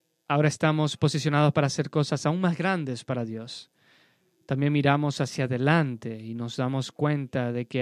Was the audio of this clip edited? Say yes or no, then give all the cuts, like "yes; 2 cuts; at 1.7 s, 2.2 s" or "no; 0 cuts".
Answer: no; 0 cuts